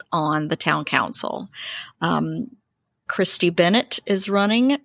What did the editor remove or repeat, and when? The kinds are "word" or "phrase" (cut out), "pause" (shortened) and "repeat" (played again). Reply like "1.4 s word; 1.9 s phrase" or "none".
2.7 s pause